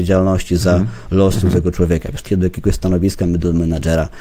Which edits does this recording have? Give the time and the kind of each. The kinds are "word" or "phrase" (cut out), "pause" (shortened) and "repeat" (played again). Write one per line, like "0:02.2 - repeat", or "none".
0:02.3 - word